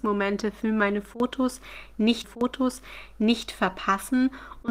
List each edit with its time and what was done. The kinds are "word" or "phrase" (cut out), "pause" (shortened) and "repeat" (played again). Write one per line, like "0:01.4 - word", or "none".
0:02.2 - repeat